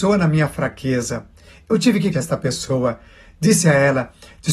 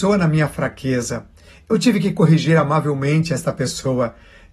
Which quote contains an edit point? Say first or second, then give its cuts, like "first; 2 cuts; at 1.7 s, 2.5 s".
first; 1 cut; at 2.1 s